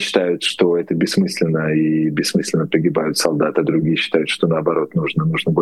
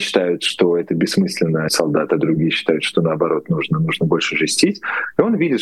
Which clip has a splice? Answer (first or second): second